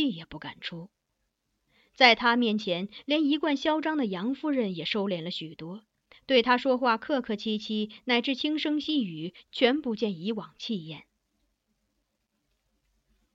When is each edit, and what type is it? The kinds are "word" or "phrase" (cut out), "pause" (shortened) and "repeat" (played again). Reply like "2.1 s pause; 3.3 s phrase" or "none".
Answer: none